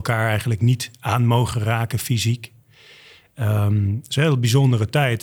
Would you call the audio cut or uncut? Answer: uncut